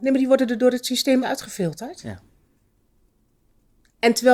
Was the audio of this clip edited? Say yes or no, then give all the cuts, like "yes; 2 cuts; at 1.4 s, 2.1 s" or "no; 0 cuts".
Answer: yes; 1 cut; at 1.2 s